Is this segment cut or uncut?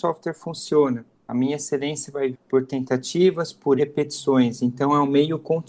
cut